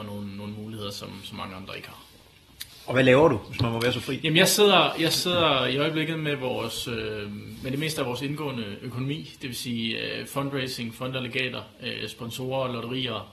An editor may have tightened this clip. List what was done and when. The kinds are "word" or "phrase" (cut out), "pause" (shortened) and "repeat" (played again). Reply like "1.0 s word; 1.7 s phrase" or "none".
none